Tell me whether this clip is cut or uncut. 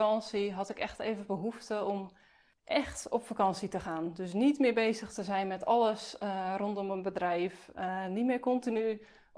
uncut